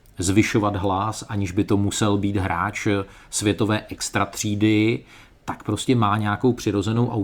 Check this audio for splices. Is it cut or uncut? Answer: uncut